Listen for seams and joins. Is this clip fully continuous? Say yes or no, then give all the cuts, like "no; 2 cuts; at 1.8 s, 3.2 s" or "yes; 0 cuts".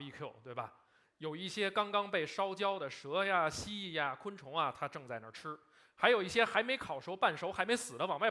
yes; 0 cuts